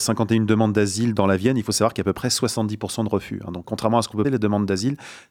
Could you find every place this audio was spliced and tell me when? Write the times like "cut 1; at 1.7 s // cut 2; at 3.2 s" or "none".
cut 1; at 3.6 s // cut 2; at 4.2 s